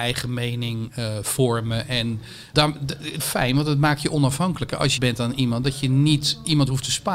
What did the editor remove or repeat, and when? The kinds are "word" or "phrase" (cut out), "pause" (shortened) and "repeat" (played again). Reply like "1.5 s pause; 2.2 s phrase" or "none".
2.5 s word; 3.2 s phrase; 5.0 s phrase